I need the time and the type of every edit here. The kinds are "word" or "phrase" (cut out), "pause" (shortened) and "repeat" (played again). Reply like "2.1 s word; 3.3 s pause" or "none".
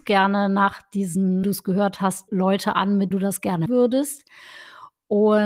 1.4 s word; 2.3 s word; 3.1 s word; 3.7 s word